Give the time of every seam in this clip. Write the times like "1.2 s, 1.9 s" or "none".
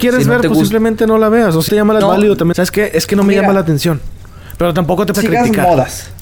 1.7 s, 2.0 s, 2.5 s, 5.1 s